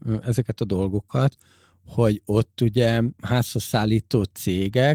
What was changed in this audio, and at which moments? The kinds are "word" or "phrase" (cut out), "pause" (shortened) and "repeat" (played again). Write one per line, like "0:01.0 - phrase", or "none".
none